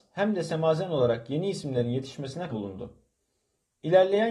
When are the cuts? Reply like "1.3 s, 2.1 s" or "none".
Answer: 2.5 s